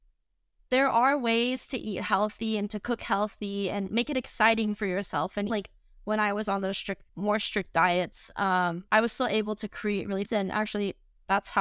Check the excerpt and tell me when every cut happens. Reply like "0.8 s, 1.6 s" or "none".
5.5 s, 7.1 s, 8.9 s, 10.3 s